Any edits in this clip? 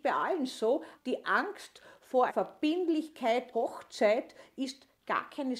yes; 3 cuts; at 1.0 s, 2.3 s, 3.5 s

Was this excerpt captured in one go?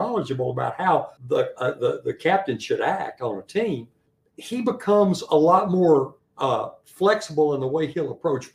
no; 2 cuts; at 1.2 s, 4.1 s

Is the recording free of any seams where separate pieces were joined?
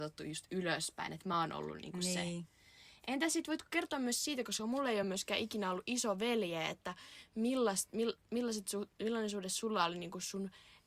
yes; 0 cuts

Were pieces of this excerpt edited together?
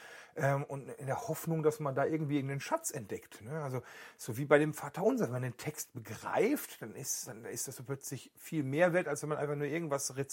no; 0 cuts

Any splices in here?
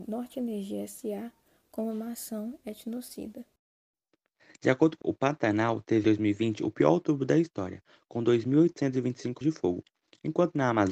yes; 3 cuts; at 5.0 s, 6.0 s, 9.4 s

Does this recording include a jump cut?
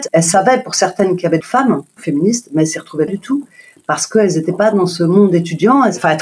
yes; 3 cuts; at 1.4 s, 2.0 s, 3.1 s

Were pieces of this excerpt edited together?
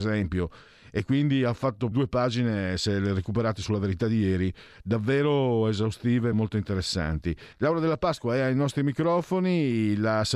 yes; 3 cuts; at 1.9 s, 6.3 s, 7.5 s

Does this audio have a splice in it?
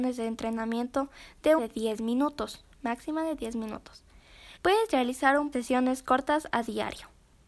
yes; 4 cuts; at 1.6 s, 2.7 s, 4.6 s, 5.5 s

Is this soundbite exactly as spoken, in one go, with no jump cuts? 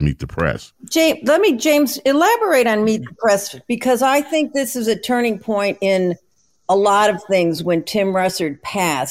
yes; 0 cuts

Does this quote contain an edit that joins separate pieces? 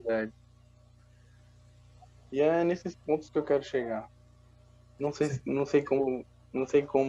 no; 0 cuts

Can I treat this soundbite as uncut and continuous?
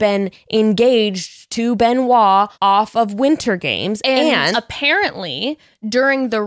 no; 2 cuts; at 2.5 s, 4.5 s

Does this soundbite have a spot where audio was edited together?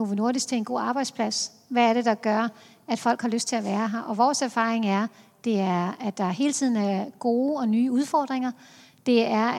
no; 0 cuts

